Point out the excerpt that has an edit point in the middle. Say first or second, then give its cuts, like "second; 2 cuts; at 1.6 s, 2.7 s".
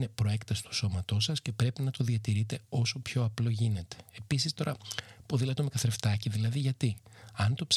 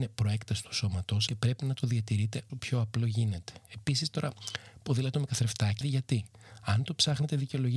second; 3 cuts; at 1.3 s, 2.5 s, 5.8 s